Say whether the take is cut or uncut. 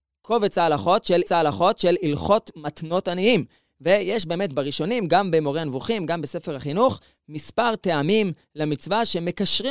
cut